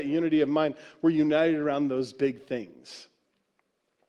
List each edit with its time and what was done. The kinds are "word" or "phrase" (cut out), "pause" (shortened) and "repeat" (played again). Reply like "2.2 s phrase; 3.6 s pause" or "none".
none